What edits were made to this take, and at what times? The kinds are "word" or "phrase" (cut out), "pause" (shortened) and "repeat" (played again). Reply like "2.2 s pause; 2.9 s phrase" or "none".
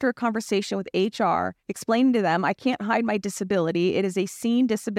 1.6 s pause